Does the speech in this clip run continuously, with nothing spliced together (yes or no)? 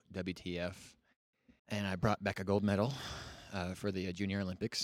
no